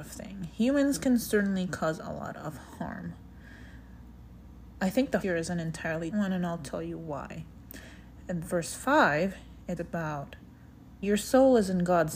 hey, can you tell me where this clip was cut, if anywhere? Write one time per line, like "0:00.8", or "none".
0:05.2
0:06.1
0:09.8
0:11.0